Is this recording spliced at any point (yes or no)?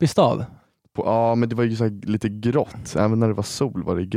no